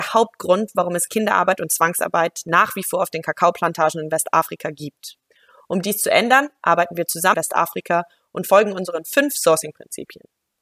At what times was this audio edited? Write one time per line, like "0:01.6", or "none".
0:07.3